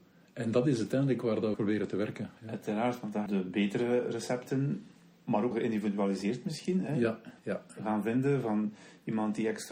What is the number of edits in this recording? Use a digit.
4